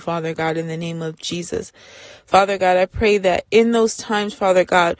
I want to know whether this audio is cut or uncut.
uncut